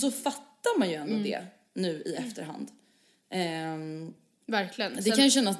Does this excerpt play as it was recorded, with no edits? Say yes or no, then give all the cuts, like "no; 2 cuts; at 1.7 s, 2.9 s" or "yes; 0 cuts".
yes; 0 cuts